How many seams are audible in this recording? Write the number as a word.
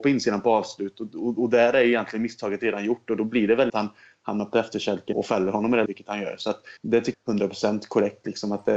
five